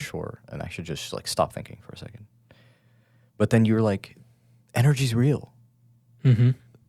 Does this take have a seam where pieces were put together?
no; 0 cuts

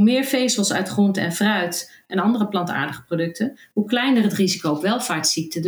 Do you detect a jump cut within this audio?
no; 0 cuts

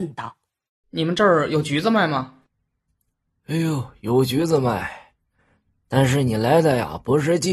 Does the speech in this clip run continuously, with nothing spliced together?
yes; 0 cuts

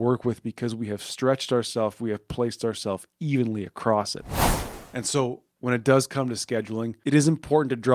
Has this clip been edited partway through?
no; 0 cuts

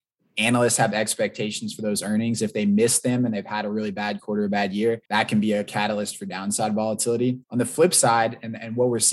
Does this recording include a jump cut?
yes; 2 cuts; at 5.1 s, 7.4 s

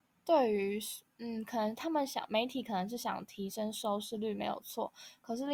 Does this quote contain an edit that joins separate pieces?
no; 0 cuts

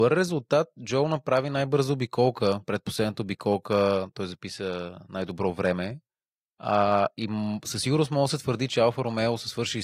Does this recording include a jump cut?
no; 0 cuts

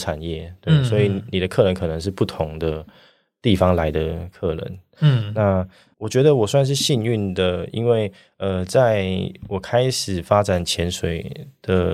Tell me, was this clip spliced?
no; 0 cuts

